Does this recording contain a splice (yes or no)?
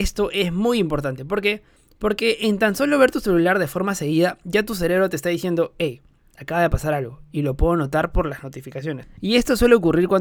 no